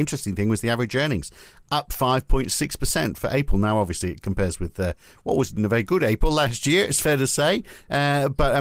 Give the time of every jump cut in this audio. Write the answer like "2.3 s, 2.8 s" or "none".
none

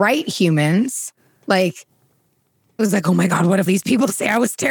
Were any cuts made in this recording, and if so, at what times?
2.8 s, 3.7 s

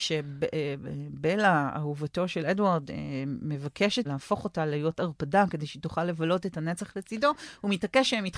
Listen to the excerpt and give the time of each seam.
4.0 s

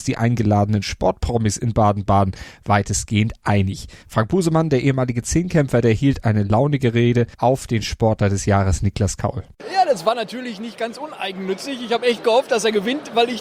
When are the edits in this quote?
4.0 s, 7.3 s

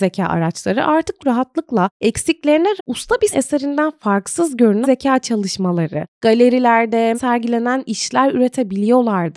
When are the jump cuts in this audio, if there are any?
1.2 s, 2.8 s, 3.3 s, 4.8 s, 7.1 s

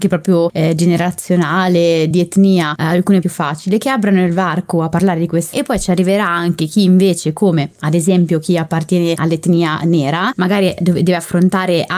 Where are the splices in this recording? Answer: 2.1 s, 3.2 s, 5.5 s

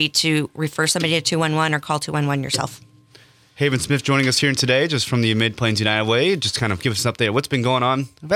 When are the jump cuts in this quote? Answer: none

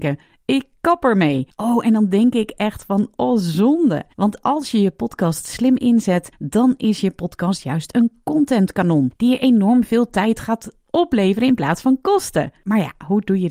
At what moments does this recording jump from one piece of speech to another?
4.1 s

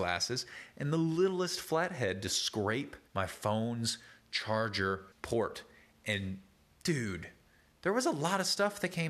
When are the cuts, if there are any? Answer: 3.1 s, 5.1 s

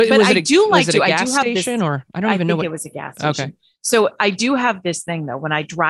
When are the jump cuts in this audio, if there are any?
none

